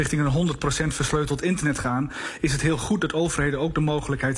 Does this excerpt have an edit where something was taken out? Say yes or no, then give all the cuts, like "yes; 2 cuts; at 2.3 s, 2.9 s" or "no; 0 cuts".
no; 0 cuts